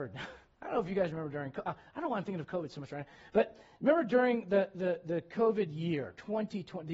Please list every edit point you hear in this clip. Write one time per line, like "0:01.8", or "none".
none